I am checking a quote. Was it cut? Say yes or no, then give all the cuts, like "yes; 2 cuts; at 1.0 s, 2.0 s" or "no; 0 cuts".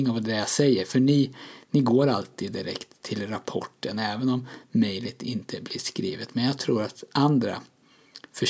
no; 0 cuts